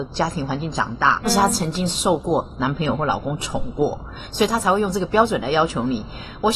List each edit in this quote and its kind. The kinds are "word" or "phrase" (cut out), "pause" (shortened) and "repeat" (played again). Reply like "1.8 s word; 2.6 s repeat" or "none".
1.2 s word

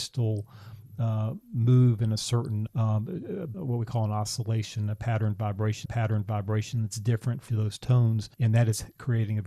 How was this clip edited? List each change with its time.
1.4 s pause; 2.7 s word; 3.5 s phrase; 5.9 s repeat; 7.5 s word; 8.3 s pause

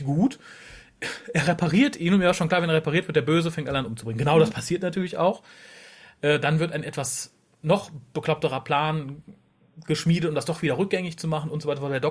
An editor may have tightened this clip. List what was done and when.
none

